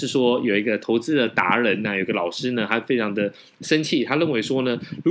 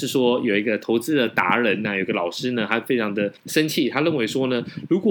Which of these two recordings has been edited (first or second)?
second